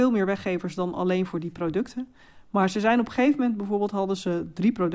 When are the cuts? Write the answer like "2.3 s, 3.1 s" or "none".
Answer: none